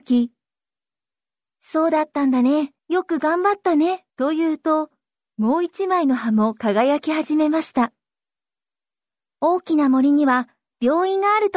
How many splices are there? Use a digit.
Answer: 2